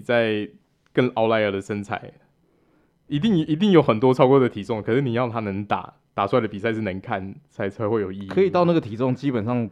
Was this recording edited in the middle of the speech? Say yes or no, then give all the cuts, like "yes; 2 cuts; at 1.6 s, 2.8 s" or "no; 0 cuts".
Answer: no; 0 cuts